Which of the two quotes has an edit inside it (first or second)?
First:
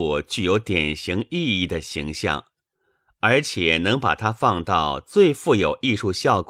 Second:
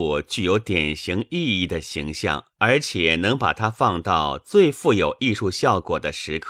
second